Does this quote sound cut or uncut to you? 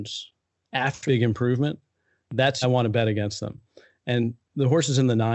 cut